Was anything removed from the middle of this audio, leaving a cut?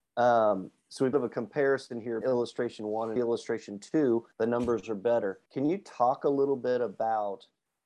yes; 5 cuts; at 1.1 s, 2.2 s, 3.2 s, 4.3 s, 5.5 s

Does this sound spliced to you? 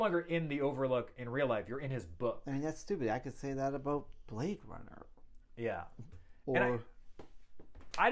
no; 0 cuts

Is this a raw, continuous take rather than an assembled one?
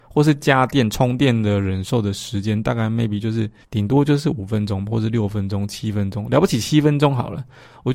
no; 1 cut; at 3.6 s

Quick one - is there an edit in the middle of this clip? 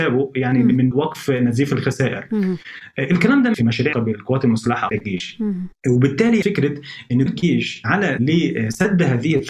yes; 6 cuts; at 0.9 s, 3.5 s, 3.9 s, 4.9 s, 6.4 s, 7.3 s

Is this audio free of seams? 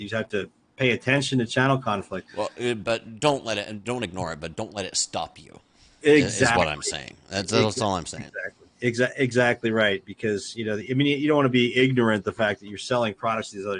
yes; 0 cuts

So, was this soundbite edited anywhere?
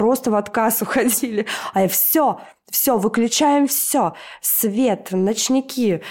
no; 0 cuts

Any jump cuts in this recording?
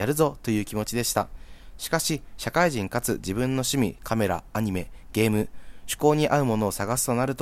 yes; 1 cut; at 4.0 s

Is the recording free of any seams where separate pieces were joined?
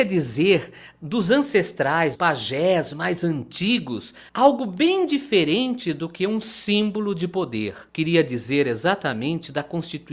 no; 3 cuts; at 2.2 s, 4.3 s, 7.9 s

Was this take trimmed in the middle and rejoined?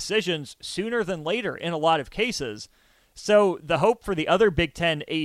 no; 0 cuts

